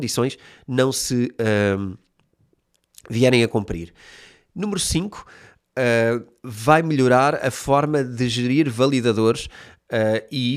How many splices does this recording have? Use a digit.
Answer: 0